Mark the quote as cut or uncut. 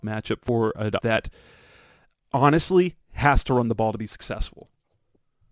cut